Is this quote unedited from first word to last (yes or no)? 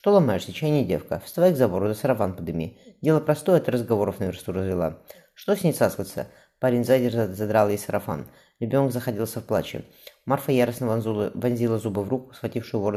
yes